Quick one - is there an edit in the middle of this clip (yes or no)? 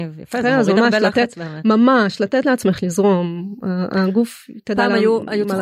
no